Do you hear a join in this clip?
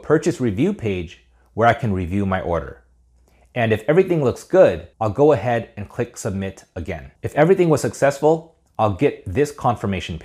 yes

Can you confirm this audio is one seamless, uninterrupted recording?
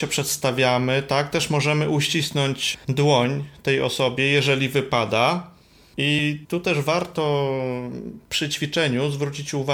yes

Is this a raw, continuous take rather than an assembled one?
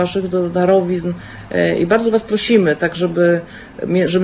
yes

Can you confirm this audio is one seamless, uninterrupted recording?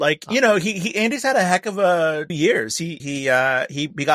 no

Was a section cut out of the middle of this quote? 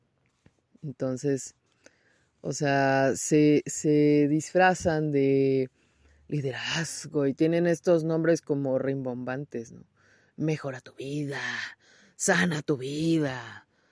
no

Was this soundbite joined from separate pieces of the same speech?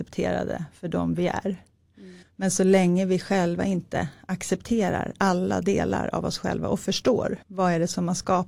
yes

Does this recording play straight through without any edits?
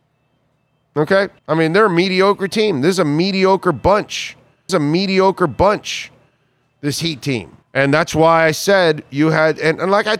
no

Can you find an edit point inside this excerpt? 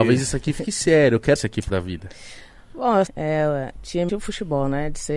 yes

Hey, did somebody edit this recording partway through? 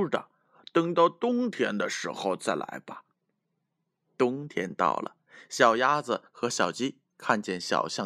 no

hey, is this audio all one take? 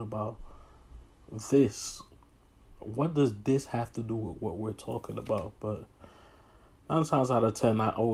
yes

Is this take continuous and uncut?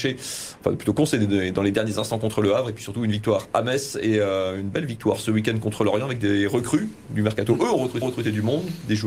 no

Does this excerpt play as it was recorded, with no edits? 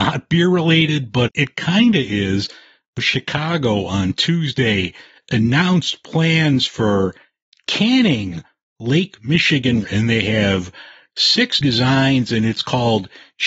no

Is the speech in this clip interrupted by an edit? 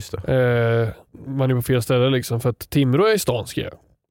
yes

